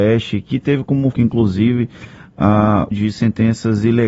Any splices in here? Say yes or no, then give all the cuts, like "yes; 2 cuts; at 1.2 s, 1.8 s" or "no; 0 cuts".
yes; 2 cuts; at 1.1 s, 2.9 s